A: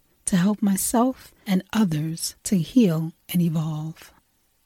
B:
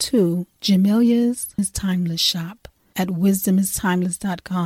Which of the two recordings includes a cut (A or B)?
B